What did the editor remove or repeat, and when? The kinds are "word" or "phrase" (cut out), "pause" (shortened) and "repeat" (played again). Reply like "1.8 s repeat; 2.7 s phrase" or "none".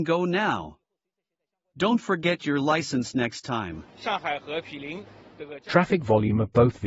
none